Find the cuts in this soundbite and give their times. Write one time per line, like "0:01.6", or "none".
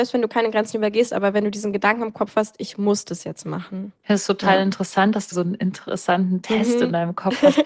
0:05.3